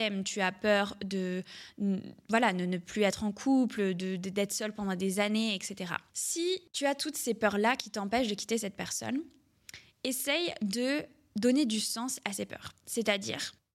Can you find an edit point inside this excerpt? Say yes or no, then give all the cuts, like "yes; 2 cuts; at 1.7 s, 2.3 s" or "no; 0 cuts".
no; 0 cuts